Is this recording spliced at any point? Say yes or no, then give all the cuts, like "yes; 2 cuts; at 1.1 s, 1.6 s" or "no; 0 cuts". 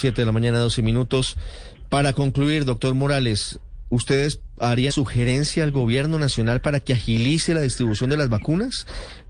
yes; 1 cut; at 4.9 s